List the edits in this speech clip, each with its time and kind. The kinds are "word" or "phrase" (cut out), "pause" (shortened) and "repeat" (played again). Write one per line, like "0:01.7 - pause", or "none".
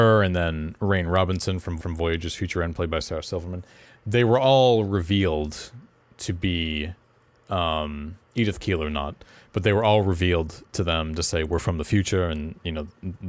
0:01.8 - repeat